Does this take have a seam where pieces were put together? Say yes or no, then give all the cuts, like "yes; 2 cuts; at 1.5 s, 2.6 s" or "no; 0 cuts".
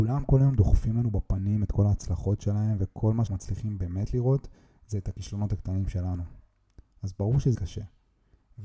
yes; 2 cuts; at 3.3 s, 7.5 s